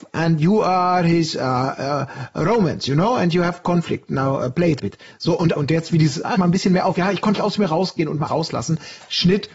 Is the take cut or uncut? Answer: cut